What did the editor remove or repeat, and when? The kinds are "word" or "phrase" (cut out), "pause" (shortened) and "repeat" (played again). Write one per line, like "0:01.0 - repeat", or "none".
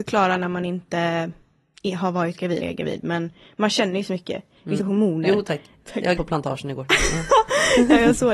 0:02.6 - word
0:04.8 - word
0:05.9 - word
0:06.2 - word